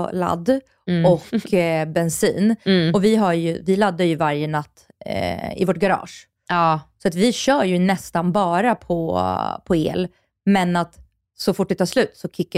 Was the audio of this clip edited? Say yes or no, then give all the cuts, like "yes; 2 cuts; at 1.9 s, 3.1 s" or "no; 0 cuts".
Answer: no; 0 cuts